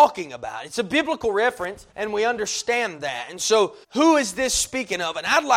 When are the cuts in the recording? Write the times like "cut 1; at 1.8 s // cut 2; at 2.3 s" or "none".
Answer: cut 1; at 1.9 s // cut 2; at 3.8 s